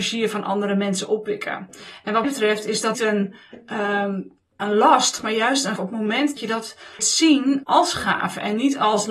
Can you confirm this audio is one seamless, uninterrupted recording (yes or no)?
no